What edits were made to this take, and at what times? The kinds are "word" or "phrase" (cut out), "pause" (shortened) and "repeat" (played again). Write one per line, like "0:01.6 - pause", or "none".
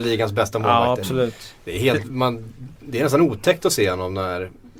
0:02.1 - word